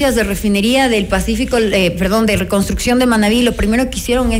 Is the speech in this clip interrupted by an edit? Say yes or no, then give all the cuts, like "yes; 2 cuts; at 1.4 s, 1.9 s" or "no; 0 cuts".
no; 0 cuts